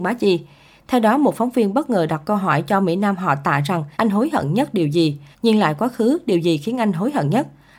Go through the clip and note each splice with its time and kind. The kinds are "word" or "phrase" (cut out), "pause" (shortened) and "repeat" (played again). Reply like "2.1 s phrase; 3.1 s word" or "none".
3.9 s pause; 5.3 s pause

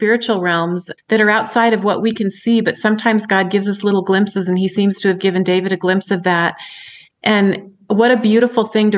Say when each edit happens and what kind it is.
none

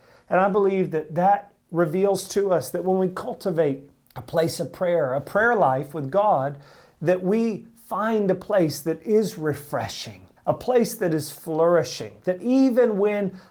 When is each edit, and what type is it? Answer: 1.6 s pause; 4.0 s pause; 10.4 s pause

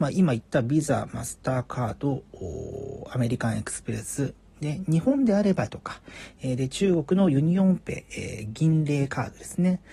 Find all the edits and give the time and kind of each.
5.7 s word

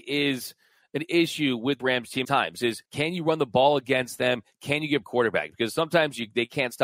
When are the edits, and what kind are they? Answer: 1.8 s word; 2.2 s word; 2.8 s pause; 5.0 s phrase

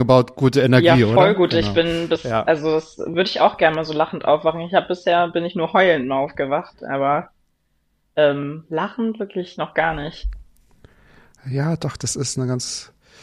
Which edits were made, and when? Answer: none

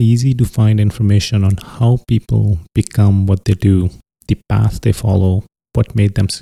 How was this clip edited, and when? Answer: none

